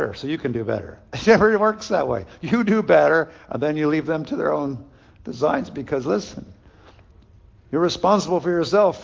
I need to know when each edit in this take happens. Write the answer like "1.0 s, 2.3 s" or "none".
none

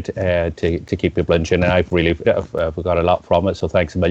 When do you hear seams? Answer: 2.2 s

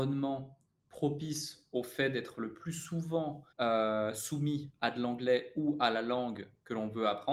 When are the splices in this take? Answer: 3.5 s

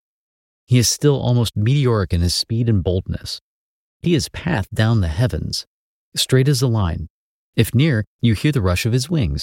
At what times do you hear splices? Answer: 4.0 s

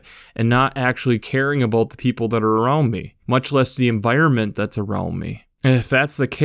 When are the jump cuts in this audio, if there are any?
3.2 s

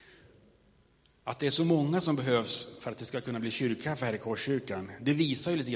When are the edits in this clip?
none

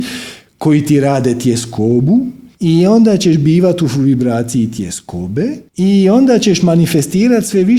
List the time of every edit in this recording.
2.5 s, 5.7 s

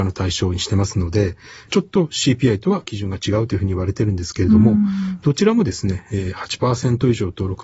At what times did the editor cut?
none

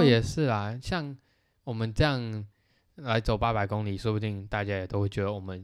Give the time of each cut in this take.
none

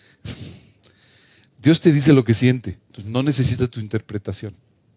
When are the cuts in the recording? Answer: 2.8 s

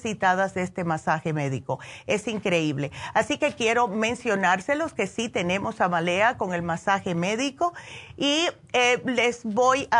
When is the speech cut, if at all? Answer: none

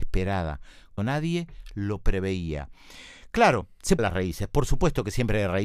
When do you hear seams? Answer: 1.0 s, 4.0 s

